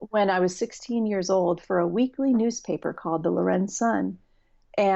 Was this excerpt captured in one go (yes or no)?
yes